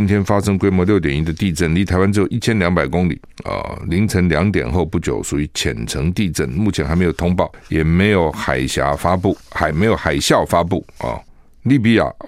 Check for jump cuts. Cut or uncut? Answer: uncut